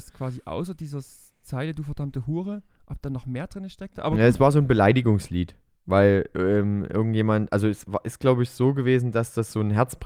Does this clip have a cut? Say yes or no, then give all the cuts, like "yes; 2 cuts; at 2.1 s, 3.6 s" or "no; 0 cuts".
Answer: no; 0 cuts